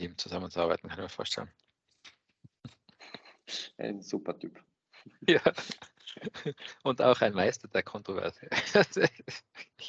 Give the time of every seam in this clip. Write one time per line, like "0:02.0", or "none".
none

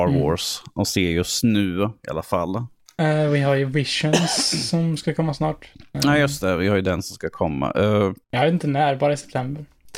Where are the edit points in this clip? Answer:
0:05.7
0:08.2

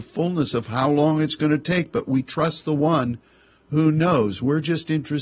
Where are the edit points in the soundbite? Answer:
none

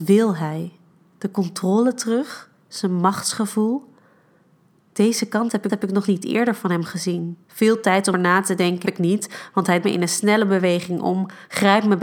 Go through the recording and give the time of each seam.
0:05.7
0:07.4
0:08.1
0:08.8
0:09.8

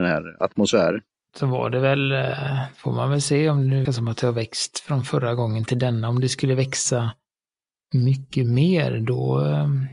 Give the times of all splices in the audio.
0:03.9

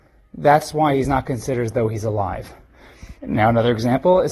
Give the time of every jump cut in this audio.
0:03.2

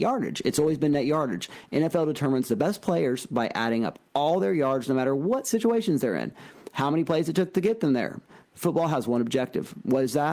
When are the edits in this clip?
none

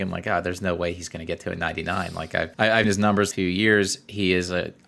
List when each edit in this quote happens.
0:02.5
0:02.8
0:03.3

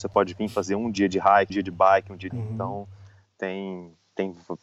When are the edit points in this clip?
0:01.5
0:02.3

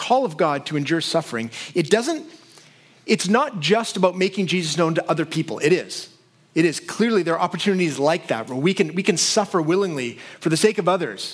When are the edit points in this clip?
none

